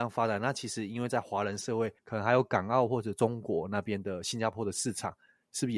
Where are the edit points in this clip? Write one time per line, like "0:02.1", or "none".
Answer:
0:02.0